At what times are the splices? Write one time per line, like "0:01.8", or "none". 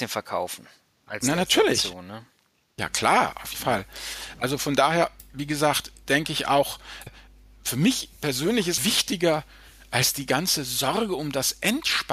0:03.5
0:07.1
0:08.8